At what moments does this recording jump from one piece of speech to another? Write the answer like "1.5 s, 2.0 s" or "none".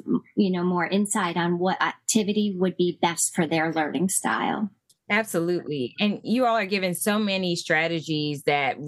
none